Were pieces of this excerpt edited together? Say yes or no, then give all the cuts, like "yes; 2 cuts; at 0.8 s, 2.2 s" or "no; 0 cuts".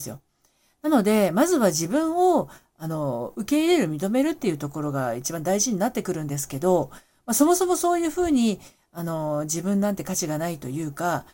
no; 0 cuts